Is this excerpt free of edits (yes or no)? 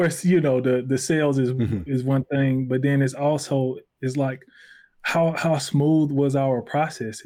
yes